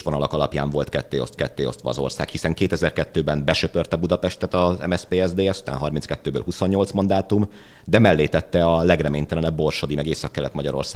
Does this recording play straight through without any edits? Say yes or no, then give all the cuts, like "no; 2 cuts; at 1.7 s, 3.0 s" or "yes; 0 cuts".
no; 1 cut; at 1.4 s